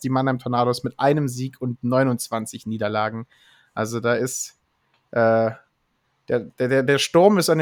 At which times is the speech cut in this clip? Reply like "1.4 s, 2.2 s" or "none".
none